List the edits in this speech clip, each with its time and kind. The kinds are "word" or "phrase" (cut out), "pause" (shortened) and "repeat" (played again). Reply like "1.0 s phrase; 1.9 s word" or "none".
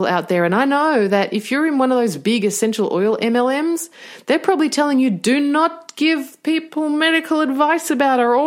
none